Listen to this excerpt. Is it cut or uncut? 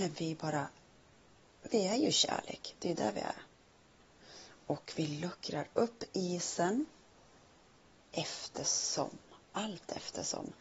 uncut